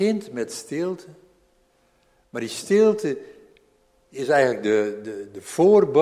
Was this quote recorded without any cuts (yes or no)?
yes